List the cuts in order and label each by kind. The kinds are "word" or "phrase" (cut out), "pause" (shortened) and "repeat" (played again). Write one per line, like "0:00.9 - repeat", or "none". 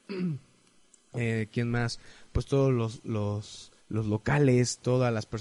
0:03.8 - pause